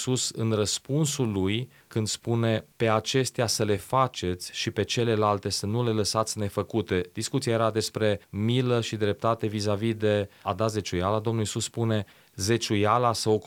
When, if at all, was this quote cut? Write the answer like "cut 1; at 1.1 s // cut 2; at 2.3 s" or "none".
none

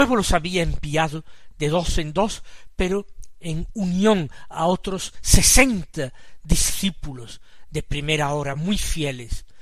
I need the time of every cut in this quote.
none

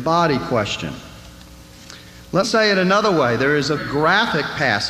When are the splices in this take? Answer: cut 1; at 2.4 s // cut 2; at 3.8 s

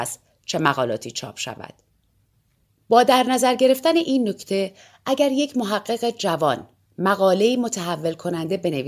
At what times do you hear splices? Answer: none

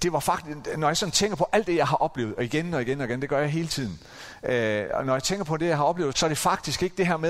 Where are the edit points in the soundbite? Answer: cut 1; at 6.1 s

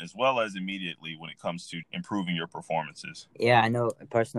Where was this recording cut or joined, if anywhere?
cut 1; at 1.8 s // cut 2; at 3.3 s

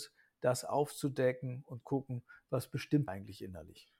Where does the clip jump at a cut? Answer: cut 1; at 1.8 s // cut 2; at 3.1 s

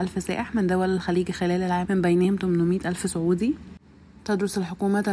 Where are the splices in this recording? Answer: cut 1; at 1.9 s

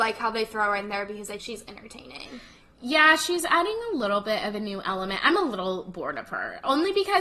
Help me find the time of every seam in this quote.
cut 1; at 1.4 s

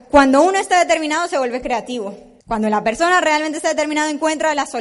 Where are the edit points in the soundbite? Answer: cut 1; at 2.4 s

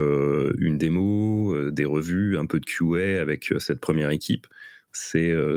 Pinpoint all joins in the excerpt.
none

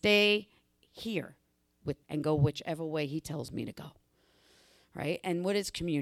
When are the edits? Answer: cut 1; at 2.0 s

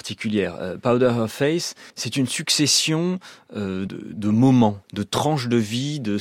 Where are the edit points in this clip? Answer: cut 1; at 1.9 s // cut 2; at 3.9 s // cut 3; at 4.8 s

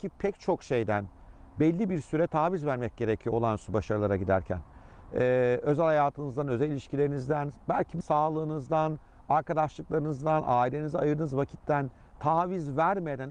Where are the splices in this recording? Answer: cut 1; at 8.0 s

